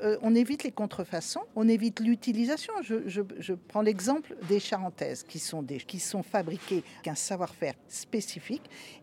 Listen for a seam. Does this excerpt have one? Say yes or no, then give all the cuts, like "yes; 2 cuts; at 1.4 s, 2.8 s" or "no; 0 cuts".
yes; 5 cuts; at 1.5 s, 4.4 s, 5.8 s, 7.0 s, 7.9 s